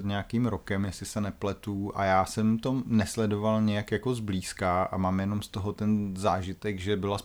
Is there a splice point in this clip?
no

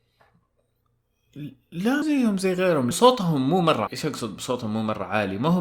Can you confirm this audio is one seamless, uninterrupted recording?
no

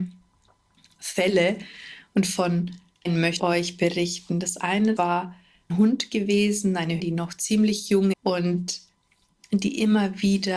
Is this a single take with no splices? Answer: no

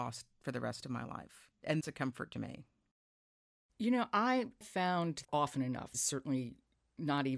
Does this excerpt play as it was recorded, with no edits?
no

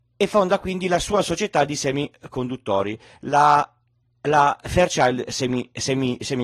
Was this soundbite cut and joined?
no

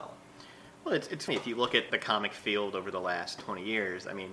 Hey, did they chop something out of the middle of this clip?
yes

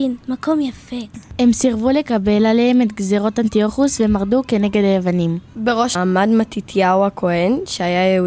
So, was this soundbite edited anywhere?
yes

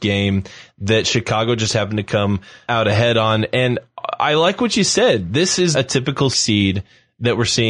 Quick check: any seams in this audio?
yes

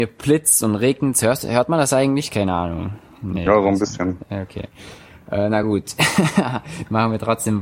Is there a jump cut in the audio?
no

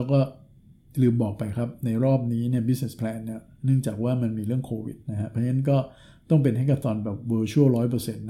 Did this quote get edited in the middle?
no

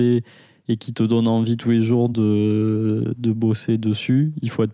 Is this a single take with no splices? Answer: yes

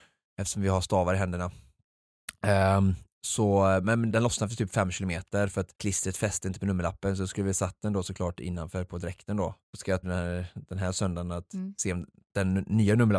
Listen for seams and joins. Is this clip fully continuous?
no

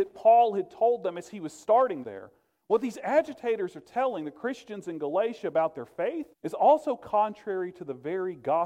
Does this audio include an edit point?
yes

